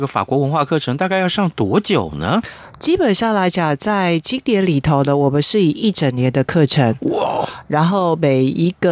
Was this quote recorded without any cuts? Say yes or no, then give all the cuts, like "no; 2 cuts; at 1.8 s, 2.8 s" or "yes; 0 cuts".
yes; 0 cuts